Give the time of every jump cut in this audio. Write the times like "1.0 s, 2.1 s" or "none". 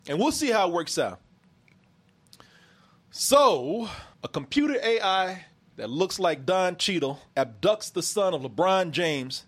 4.1 s, 5.5 s, 7.3 s